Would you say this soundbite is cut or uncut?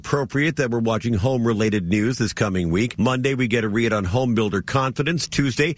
uncut